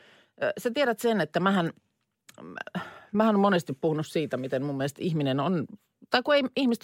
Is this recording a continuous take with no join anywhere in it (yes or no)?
yes